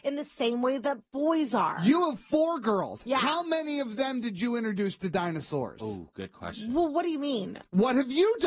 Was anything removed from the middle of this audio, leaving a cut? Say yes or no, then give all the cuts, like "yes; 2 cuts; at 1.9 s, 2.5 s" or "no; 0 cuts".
no; 0 cuts